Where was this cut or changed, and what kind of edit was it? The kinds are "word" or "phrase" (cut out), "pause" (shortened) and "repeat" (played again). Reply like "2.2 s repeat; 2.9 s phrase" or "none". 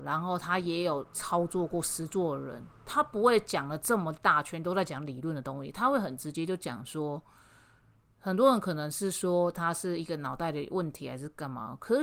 8.1 s phrase